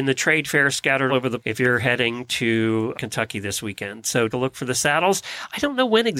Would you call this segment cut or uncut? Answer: cut